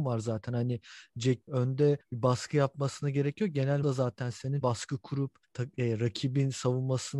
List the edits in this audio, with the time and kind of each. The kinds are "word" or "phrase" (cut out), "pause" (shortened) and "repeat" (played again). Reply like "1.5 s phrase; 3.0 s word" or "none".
1.5 s word; 2.0 s pause; 3.8 s word; 4.6 s phrase; 5.4 s pause

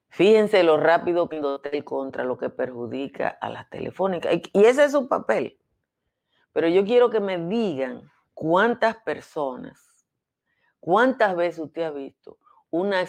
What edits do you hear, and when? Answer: 1.3 s word; 8.2 s pause

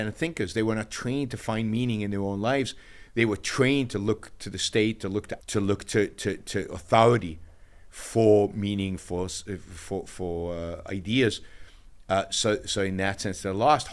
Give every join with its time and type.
5.4 s word; 9.0 s word

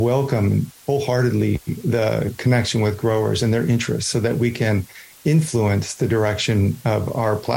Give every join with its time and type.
none

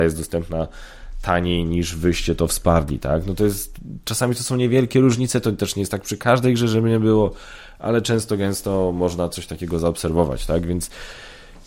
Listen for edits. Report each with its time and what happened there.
none

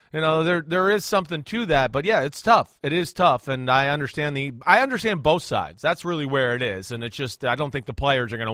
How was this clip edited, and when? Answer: none

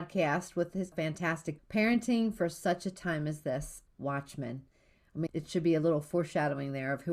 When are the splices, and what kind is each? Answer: 0.9 s word; 1.6 s word; 3.9 s word; 5.3 s word

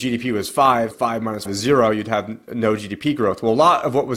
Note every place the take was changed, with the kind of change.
0.9 s word; 1.5 s word

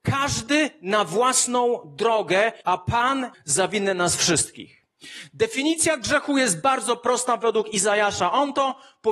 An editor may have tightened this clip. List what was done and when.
2.6 s pause; 3.3 s phrase

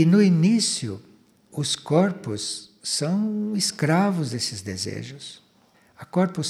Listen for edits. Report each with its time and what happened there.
none

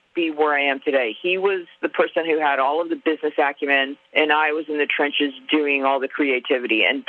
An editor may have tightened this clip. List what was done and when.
4.1 s pause

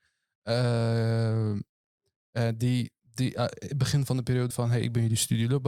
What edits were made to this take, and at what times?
3.1 s pause; 4.5 s word

